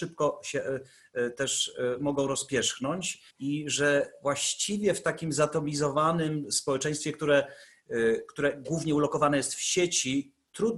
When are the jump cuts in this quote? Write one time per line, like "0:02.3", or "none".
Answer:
0:03.3